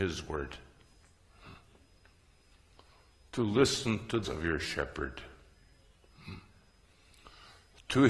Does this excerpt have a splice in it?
yes; 1 cut; at 4.2 s

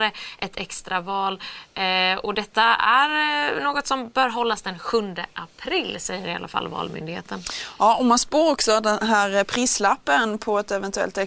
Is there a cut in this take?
no; 0 cuts

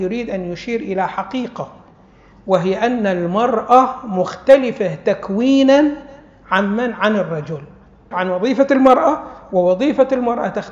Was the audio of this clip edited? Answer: yes; 1 cut; at 8.1 s

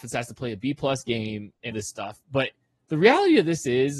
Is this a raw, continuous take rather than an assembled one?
no; 1 cut; at 1.7 s

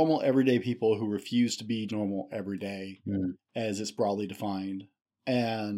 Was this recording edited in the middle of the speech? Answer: yes; 1 cut; at 1.9 s

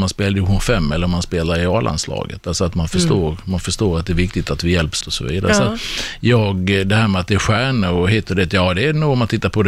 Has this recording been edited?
yes; 1 cut; at 5.0 s

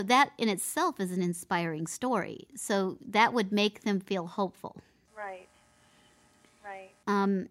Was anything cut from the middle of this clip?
no; 0 cuts

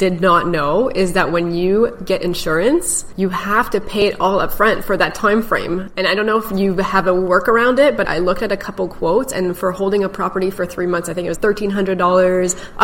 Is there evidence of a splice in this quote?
yes; 1 cut; at 11.3 s

